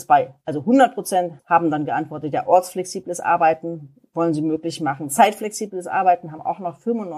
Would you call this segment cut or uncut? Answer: cut